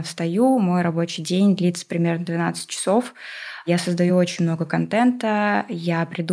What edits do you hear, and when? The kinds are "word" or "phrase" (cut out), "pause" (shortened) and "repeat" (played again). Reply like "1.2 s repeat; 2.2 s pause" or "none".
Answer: none